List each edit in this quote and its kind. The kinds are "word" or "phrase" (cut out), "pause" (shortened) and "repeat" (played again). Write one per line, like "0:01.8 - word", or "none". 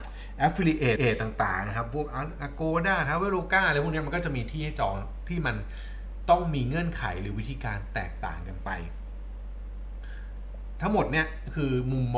0:01.0 - repeat